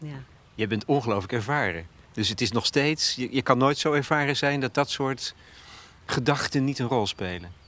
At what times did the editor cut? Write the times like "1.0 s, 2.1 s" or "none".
2.0 s